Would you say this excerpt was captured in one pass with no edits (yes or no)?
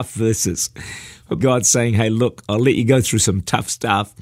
no